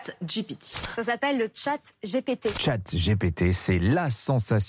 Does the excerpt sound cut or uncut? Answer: uncut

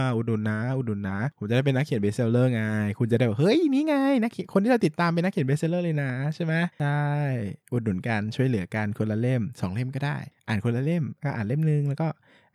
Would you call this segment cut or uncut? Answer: cut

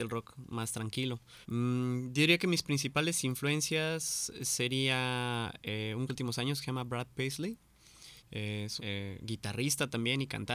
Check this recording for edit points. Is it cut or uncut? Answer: cut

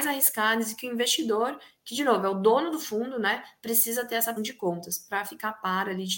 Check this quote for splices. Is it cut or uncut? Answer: cut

